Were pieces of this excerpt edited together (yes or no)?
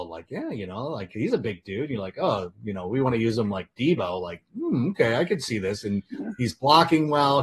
no